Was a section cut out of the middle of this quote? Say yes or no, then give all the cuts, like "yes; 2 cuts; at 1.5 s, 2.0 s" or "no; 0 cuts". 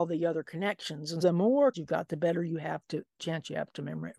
yes; 2 cuts; at 1.2 s, 1.7 s